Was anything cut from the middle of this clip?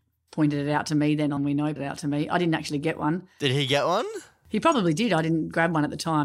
yes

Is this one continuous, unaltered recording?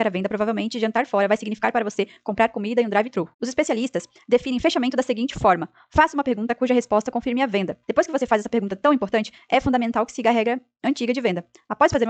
no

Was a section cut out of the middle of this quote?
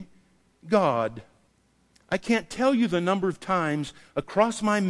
yes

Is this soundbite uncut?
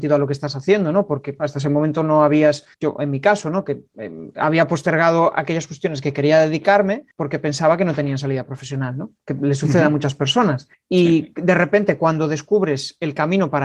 no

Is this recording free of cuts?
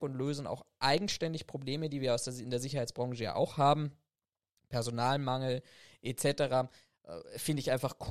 yes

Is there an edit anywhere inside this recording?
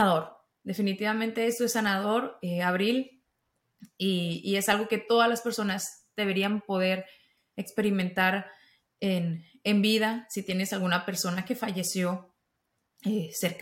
no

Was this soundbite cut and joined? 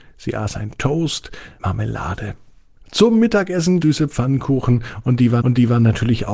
yes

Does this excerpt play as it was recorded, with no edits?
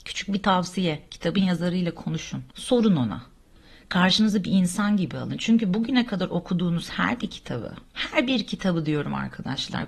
no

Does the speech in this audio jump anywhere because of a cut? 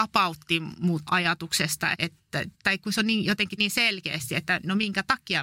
yes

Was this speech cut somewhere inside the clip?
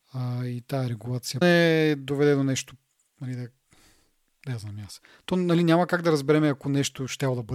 yes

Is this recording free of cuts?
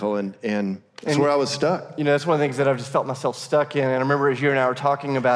yes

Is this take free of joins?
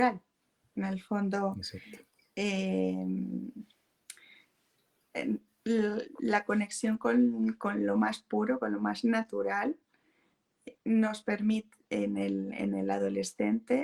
yes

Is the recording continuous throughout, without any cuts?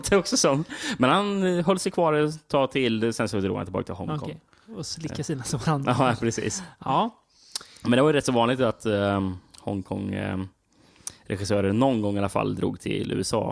yes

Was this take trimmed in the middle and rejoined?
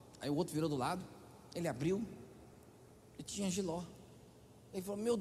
no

